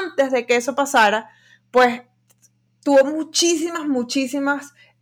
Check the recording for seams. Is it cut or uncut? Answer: uncut